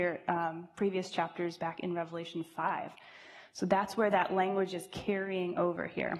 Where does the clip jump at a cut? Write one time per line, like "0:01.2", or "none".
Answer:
none